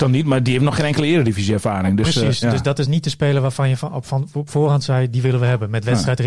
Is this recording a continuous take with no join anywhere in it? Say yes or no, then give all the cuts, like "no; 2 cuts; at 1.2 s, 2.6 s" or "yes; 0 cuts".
yes; 0 cuts